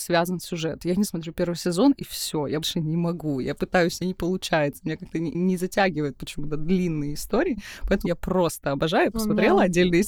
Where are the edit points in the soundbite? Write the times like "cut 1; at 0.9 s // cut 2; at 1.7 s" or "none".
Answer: cut 1; at 1.1 s // cut 2; at 2.6 s // cut 3; at 4.0 s // cut 4; at 5.3 s // cut 5; at 8.1 s